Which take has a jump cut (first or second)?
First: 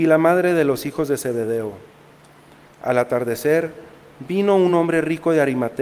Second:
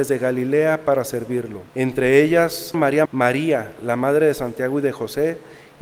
second